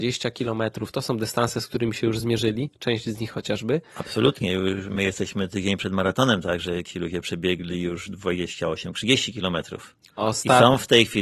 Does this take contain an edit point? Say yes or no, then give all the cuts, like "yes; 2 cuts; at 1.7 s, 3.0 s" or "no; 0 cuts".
no; 0 cuts